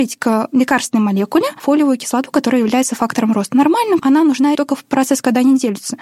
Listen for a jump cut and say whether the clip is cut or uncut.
cut